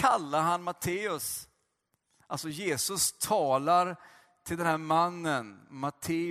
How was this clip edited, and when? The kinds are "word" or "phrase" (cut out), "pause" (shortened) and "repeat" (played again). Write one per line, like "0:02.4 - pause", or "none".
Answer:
none

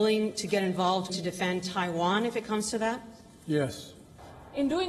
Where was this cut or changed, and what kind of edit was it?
0:01.1 - word

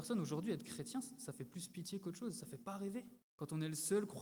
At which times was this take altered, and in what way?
0:03.2 - pause

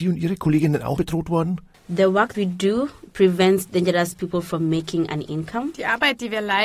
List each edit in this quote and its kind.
0:01.0 - word
0:02.3 - word

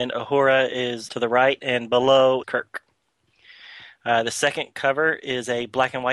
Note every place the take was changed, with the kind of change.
0:01.1 - word
0:02.4 - word

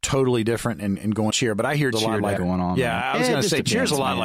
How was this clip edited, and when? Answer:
0:01.3 - word
0:01.9 - word
0:02.4 - word

